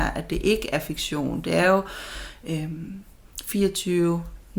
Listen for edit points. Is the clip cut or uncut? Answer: uncut